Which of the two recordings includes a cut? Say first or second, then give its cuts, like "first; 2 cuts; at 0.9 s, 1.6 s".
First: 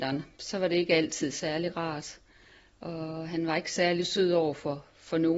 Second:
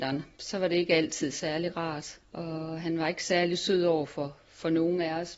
second; 1 cut; at 2.2 s